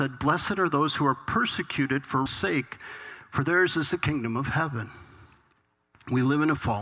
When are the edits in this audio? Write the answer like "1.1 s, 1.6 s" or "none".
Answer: 2.3 s